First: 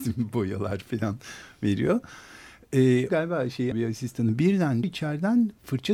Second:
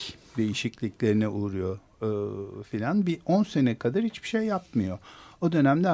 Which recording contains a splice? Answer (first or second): first